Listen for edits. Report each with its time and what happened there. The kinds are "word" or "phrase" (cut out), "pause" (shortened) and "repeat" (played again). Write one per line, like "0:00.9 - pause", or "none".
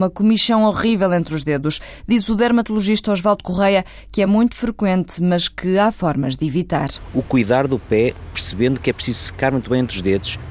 none